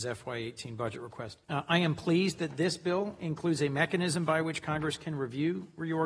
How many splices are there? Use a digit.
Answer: 1